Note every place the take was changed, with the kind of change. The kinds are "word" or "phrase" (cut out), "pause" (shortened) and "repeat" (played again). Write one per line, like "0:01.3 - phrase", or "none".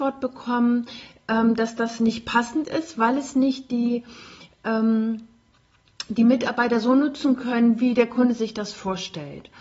none